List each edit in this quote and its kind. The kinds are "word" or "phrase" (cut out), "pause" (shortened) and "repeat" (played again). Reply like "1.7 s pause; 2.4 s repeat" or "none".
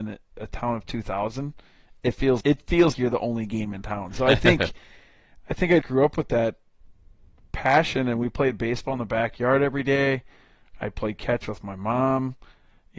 2.4 s word; 2.9 s word; 5.8 s word